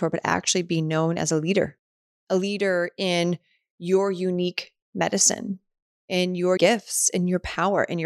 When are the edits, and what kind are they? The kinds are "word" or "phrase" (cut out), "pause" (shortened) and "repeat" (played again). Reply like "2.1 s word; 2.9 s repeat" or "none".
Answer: 6.6 s word